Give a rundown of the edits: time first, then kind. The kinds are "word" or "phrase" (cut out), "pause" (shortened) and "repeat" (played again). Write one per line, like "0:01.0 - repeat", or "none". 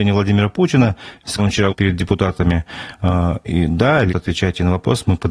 0:01.4 - word
0:01.7 - word
0:04.1 - word